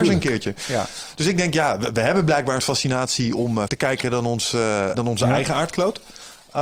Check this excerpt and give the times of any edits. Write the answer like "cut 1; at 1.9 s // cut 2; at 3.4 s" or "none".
cut 1; at 2.6 s // cut 2; at 3.7 s // cut 3; at 4.9 s